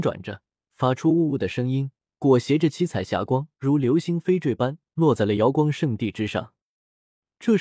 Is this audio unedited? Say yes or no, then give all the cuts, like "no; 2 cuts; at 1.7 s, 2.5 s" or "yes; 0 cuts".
no; 2 cuts; at 2.1 s, 3.5 s